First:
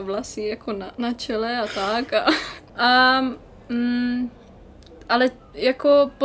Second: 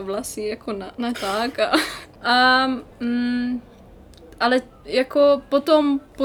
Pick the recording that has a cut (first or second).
second